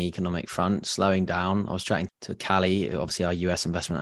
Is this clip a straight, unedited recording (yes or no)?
no